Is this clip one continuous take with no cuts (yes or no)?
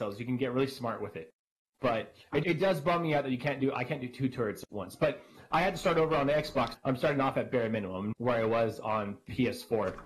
no